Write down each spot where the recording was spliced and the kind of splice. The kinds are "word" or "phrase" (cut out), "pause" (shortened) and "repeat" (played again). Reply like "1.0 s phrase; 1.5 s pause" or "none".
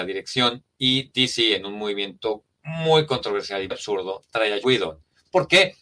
3.7 s word; 4.6 s word